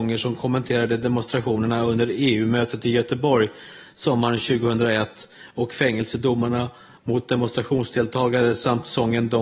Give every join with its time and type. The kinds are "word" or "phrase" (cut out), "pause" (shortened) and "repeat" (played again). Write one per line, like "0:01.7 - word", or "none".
none